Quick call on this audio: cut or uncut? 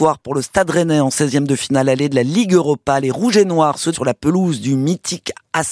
cut